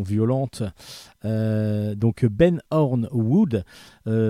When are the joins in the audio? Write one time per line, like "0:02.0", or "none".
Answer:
0:02.7